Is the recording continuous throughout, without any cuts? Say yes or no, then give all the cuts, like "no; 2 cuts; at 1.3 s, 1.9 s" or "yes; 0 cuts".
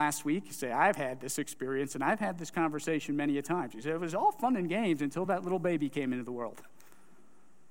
yes; 0 cuts